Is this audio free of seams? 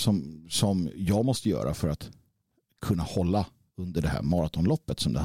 yes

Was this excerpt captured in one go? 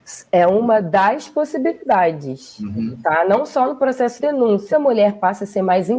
no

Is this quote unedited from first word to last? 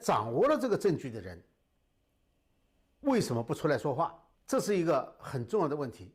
no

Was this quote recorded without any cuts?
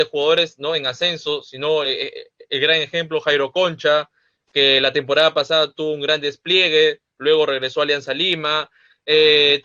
yes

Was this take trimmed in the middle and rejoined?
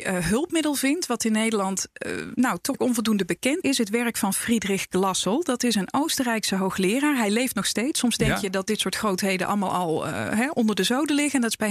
yes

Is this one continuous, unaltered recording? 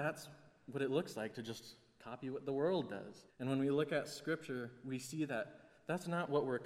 no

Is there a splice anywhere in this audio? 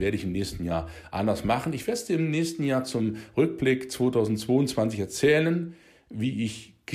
no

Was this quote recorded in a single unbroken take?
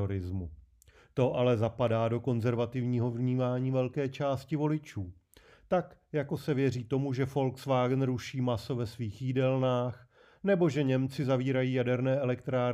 yes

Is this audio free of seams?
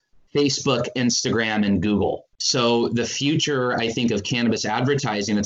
no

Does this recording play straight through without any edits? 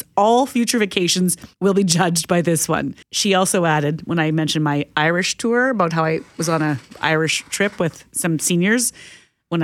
no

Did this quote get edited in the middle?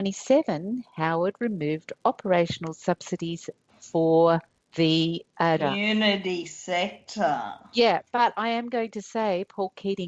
yes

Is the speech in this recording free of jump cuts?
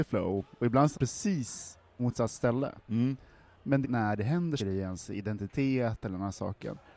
no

